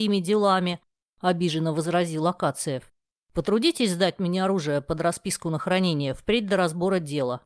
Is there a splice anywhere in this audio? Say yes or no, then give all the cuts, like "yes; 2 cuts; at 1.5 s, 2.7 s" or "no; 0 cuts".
no; 0 cuts